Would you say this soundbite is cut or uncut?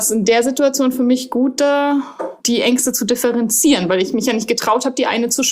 cut